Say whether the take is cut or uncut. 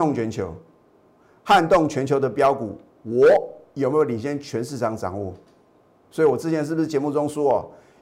uncut